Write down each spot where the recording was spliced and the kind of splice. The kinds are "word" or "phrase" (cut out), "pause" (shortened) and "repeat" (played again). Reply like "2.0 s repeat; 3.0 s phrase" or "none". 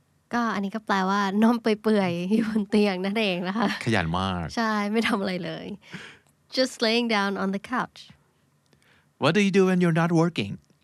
none